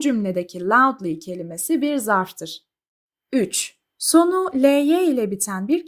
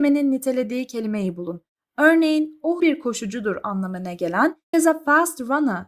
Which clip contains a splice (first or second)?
second